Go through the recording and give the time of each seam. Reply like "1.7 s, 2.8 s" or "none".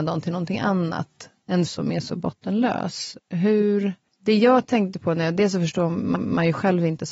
1.7 s, 4.1 s, 6.2 s